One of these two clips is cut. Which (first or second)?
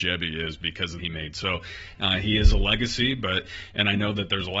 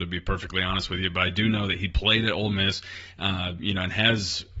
first